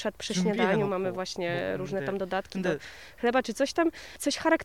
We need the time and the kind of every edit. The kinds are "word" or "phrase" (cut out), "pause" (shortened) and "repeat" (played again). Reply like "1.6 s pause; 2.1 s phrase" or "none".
none